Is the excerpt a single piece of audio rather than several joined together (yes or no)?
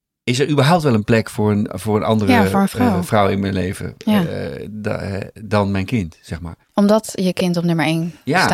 no